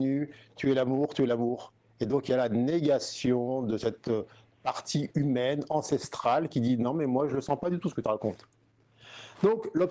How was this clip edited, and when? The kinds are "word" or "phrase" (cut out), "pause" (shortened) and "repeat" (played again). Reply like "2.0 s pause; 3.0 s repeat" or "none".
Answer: none